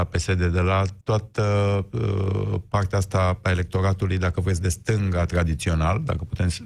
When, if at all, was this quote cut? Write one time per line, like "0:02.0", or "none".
0:01.0